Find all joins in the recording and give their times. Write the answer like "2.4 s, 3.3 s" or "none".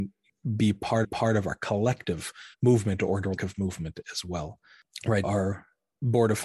1.0 s, 2.5 s, 3.4 s, 5.2 s